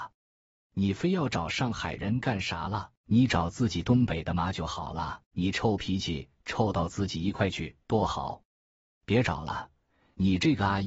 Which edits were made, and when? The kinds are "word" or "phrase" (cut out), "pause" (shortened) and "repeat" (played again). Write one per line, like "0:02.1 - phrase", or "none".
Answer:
0:03.0 - pause
0:05.3 - pause
0:07.8 - pause